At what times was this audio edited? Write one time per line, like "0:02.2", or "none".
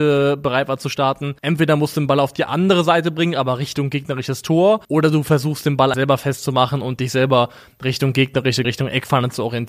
0:01.4
0:04.8
0:05.9
0:08.6